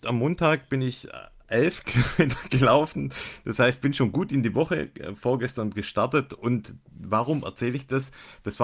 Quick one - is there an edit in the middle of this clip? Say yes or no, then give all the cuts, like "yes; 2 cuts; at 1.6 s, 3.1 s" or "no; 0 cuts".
no; 0 cuts